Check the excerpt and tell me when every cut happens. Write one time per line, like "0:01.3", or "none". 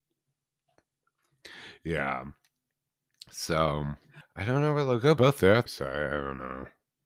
0:04.2
0:05.2
0:05.7